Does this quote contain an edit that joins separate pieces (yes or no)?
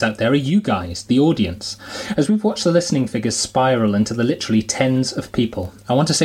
no